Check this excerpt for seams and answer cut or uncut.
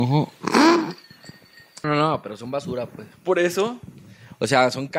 cut